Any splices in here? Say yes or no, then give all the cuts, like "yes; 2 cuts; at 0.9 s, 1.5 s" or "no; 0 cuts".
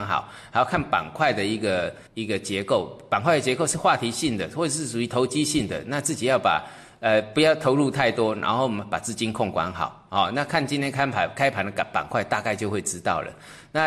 yes; 1 cut; at 2.1 s